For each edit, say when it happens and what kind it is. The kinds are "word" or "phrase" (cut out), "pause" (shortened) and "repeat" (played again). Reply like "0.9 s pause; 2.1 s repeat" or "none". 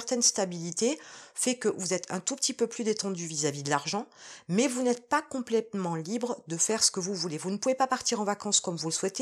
none